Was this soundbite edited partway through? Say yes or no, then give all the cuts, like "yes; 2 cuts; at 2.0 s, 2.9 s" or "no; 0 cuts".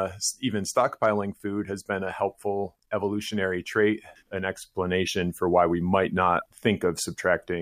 yes; 2 cuts; at 4.2 s, 6.5 s